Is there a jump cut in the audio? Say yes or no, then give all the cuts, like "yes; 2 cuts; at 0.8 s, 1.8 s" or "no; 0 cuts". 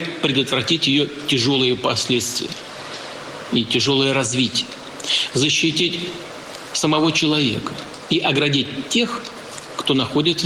no; 0 cuts